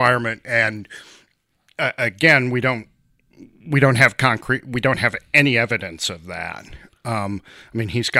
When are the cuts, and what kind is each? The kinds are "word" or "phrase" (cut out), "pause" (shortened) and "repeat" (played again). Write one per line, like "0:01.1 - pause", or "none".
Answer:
none